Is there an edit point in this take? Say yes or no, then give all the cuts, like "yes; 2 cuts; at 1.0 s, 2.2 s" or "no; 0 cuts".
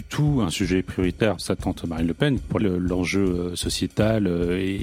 yes; 2 cuts; at 1.4 s, 2.6 s